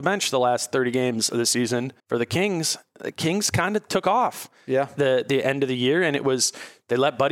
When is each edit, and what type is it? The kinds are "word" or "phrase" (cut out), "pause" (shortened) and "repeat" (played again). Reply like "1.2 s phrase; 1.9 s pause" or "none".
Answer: 2.0 s pause